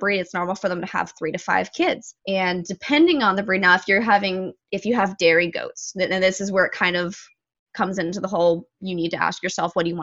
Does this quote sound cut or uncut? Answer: cut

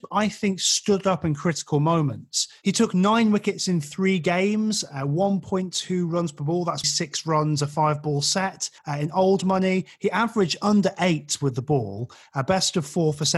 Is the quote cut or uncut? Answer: cut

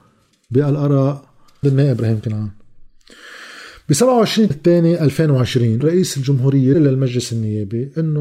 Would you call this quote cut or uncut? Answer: cut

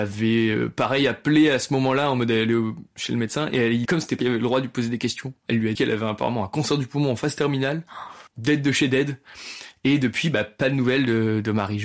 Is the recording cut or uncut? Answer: cut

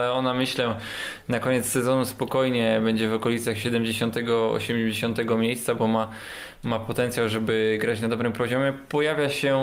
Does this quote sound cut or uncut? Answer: uncut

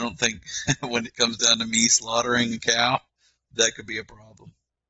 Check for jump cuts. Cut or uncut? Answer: uncut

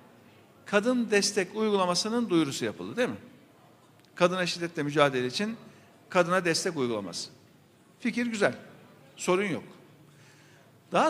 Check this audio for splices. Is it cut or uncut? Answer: uncut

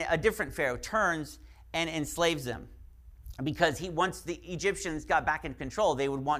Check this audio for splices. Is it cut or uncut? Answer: uncut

